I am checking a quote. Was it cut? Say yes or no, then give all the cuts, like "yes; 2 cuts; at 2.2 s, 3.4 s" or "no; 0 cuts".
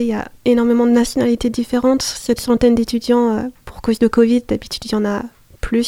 yes; 1 cut; at 2.4 s